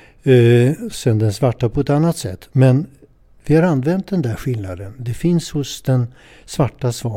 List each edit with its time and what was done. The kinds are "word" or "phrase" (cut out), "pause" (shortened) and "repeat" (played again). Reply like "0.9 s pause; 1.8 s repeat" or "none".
none